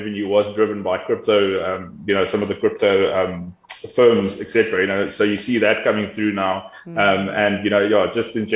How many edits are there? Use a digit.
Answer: 0